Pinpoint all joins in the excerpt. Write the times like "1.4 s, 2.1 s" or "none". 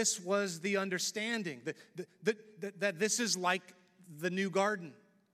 none